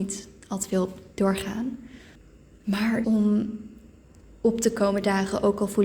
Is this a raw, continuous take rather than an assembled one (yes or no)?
no